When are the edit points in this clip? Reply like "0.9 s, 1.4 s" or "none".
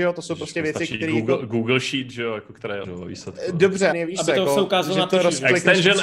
2.8 s, 3.9 s